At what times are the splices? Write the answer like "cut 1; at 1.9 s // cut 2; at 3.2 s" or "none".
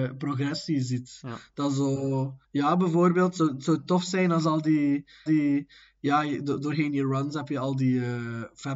cut 1; at 2.4 s // cut 2; at 5.3 s